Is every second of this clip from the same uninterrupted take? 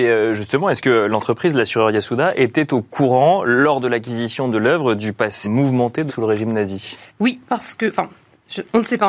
no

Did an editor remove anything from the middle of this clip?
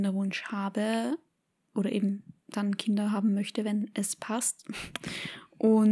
no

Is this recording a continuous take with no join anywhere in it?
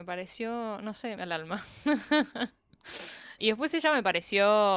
no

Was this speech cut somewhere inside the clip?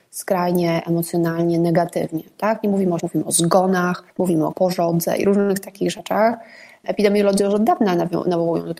yes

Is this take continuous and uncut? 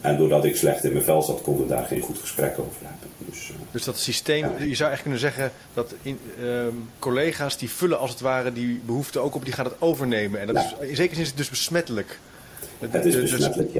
no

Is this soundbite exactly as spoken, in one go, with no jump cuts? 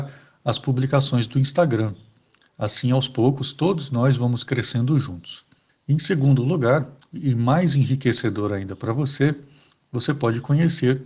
yes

